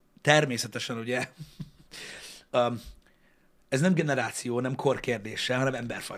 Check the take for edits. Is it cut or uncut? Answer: uncut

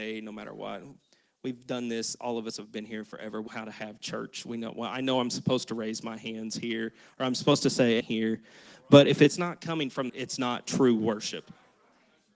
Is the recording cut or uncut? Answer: cut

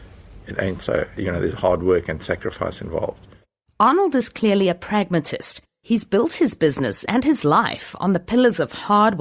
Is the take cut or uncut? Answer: uncut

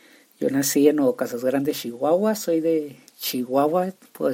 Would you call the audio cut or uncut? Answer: uncut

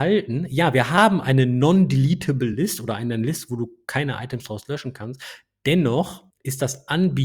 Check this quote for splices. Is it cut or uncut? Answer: uncut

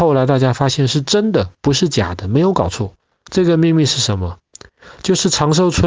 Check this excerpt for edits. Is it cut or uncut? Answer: cut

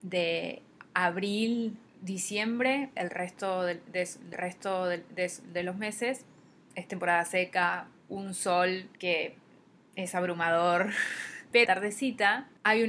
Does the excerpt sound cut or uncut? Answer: cut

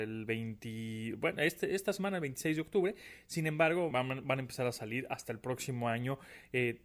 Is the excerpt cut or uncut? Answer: cut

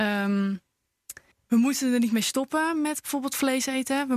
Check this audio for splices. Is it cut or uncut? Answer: cut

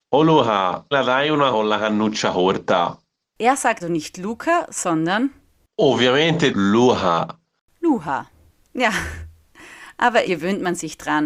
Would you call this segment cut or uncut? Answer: cut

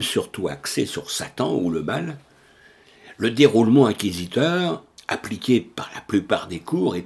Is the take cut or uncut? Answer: uncut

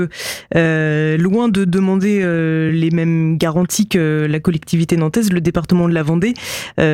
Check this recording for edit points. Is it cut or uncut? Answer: uncut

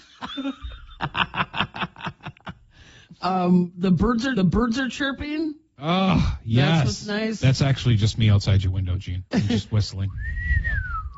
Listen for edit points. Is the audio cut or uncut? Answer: cut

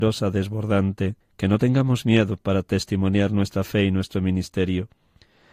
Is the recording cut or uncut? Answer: cut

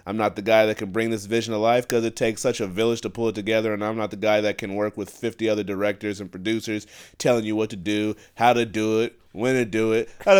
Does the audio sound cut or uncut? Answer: uncut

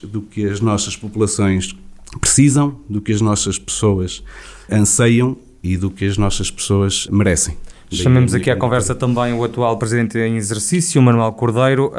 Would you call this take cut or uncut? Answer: cut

